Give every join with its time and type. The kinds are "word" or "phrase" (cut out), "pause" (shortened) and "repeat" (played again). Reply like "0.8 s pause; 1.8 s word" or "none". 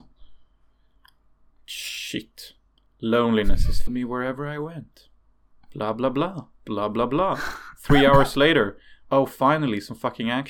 2.8 s pause; 3.9 s word; 6.5 s pause